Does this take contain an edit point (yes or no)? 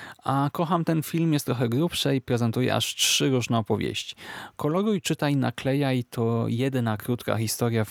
no